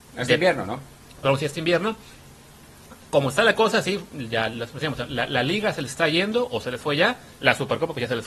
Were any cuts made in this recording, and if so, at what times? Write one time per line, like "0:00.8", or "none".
0:07.4